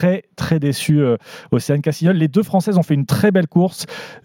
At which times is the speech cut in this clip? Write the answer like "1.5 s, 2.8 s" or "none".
none